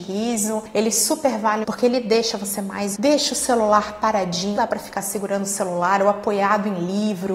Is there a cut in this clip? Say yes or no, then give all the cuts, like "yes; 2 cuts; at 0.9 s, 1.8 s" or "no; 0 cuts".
yes; 3 cuts; at 1.6 s, 2.9 s, 4.6 s